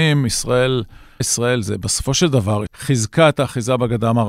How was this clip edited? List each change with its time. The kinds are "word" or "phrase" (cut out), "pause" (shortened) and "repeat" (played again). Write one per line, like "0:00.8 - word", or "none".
0:01.2 - word
0:02.7 - word